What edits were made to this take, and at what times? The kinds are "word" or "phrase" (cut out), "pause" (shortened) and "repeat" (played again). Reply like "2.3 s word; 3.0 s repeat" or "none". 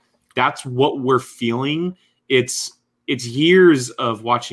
none